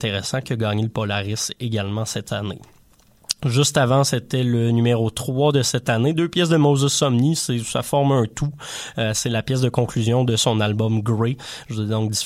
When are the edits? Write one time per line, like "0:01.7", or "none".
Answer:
none